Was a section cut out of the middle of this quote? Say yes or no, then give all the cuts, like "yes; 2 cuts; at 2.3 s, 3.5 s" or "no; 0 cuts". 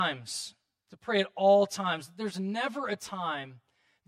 no; 0 cuts